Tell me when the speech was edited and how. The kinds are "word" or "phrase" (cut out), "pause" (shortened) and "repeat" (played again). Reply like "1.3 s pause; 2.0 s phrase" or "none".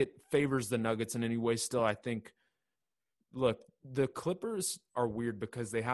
none